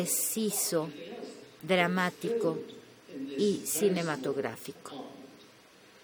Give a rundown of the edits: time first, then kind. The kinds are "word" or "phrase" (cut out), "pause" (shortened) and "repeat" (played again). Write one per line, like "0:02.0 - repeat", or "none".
none

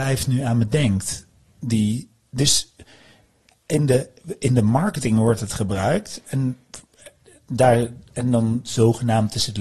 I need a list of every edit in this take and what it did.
none

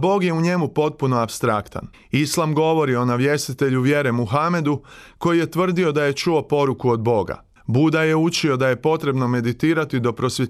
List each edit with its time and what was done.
0:01.9 - pause
0:07.6 - pause

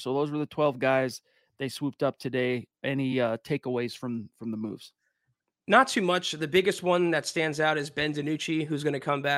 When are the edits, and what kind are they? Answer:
none

